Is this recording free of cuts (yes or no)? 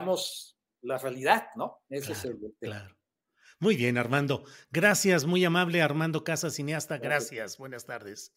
yes